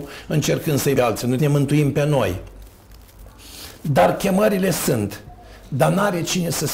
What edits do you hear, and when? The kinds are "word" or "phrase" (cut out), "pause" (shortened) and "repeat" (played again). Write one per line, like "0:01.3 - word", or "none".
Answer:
0:00.9 - word
0:01.4 - word